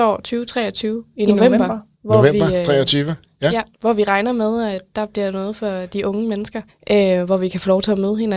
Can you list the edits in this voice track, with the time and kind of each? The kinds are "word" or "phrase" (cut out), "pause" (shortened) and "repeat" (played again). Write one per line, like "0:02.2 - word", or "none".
0:01.9 - pause
0:03.7 - pause
0:06.7 - pause